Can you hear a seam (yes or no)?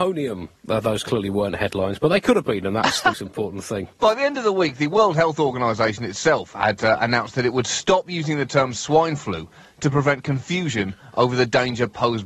yes